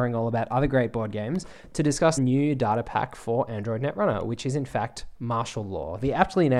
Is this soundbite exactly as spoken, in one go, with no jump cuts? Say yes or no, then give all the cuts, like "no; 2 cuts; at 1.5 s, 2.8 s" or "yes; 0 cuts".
no; 1 cut; at 2.2 s